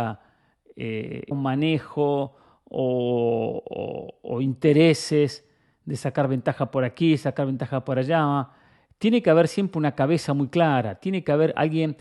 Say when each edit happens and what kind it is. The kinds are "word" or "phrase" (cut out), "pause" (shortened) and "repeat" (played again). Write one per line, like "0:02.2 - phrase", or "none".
0:01.3 - word